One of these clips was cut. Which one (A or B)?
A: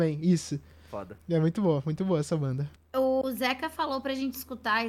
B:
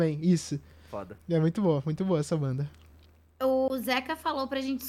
A